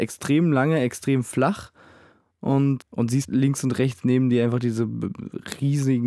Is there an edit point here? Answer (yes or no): yes